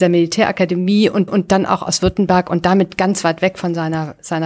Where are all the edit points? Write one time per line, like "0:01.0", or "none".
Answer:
0:01.3